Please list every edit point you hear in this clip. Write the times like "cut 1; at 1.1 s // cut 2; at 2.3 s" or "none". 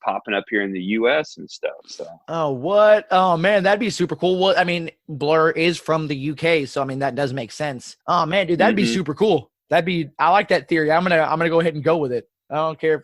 cut 1; at 8.0 s // cut 2; at 9.6 s